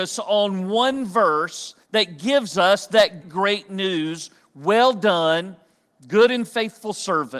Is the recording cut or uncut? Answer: cut